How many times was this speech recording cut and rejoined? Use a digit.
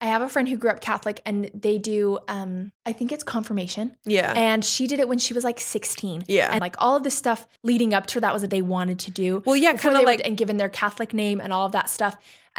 6